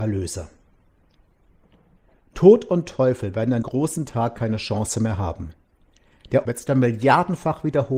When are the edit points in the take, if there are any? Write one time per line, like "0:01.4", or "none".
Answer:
0:03.6
0:06.5